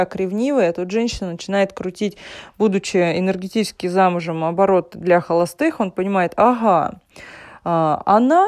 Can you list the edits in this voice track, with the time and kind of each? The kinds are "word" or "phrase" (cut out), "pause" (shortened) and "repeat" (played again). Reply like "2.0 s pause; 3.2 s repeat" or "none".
none